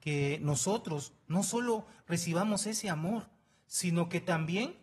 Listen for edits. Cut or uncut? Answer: uncut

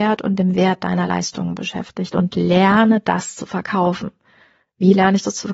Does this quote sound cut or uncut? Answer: uncut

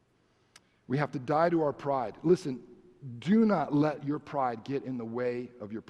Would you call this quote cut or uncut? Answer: uncut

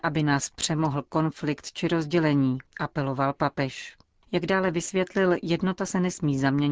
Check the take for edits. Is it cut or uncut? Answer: uncut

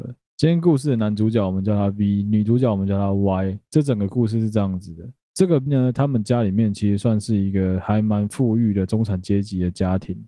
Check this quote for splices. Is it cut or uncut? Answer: cut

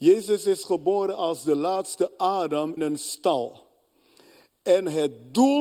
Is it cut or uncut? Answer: cut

